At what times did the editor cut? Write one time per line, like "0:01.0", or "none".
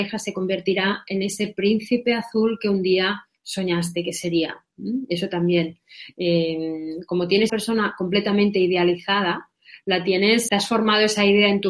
0:07.5
0:10.5